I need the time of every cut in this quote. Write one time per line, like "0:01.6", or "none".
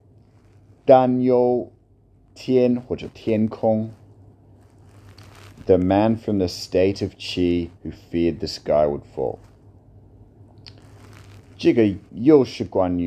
0:07.8
0:12.1